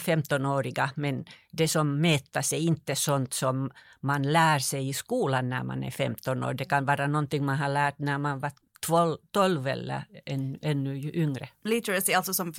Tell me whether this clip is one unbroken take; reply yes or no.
yes